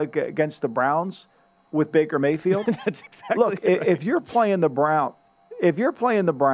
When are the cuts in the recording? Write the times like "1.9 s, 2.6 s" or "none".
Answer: none